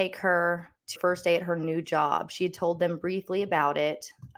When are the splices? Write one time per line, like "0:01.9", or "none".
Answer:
0:01.0

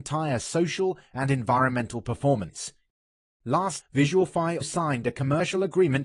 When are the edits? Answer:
0:03.8
0:04.6

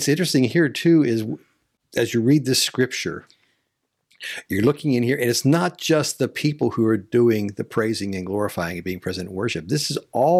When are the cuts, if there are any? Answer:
none

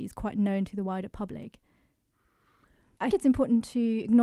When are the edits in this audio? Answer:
0:03.1

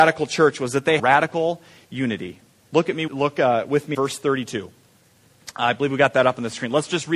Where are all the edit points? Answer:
0:01.0
0:03.1
0:03.9

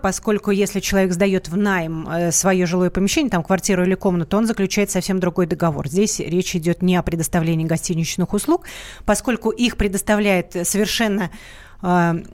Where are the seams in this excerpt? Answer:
none

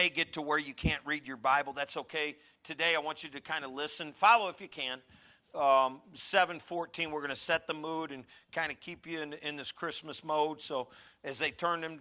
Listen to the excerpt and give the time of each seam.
none

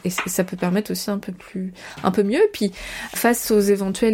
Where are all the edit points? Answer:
0:01.1
0:03.1

